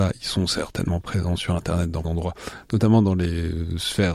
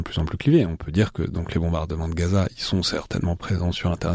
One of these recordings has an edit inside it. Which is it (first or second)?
first